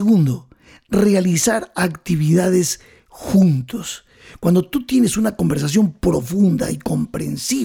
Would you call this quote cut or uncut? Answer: uncut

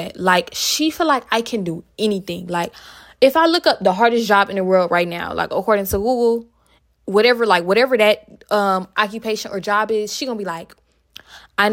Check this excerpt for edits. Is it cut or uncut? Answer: uncut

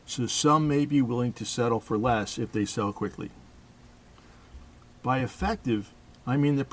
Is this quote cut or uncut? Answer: uncut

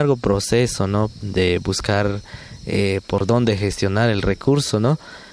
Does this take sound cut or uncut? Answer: uncut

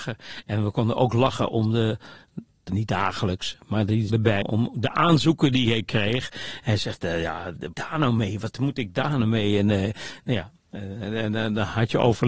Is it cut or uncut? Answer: cut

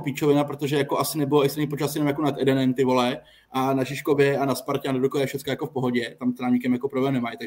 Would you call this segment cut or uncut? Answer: uncut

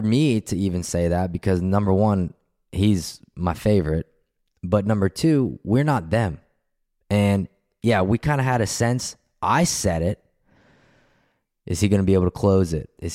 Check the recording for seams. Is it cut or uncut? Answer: uncut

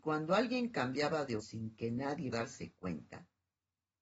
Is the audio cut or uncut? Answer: cut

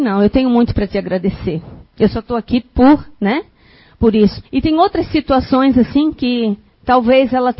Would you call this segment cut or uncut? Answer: cut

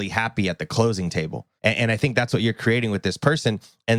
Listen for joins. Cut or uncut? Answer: cut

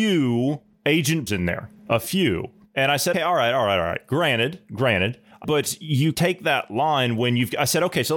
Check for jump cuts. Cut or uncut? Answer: cut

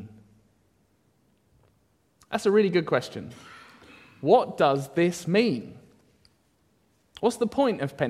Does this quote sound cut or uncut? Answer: uncut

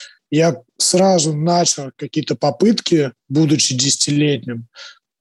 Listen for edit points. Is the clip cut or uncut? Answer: cut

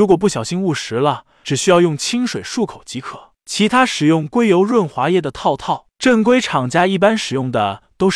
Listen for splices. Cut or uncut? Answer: uncut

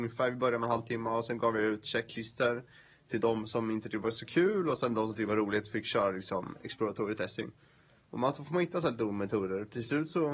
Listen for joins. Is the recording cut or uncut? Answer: uncut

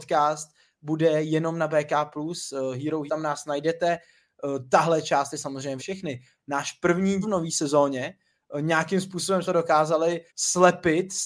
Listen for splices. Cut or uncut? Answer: cut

